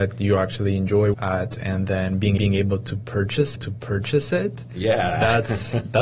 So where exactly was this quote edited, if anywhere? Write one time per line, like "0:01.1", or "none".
0:01.1
0:02.4
0:03.6